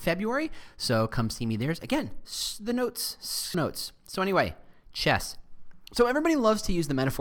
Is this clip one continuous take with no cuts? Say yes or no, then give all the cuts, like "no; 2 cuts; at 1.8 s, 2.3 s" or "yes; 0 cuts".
no; 1 cut; at 3.5 s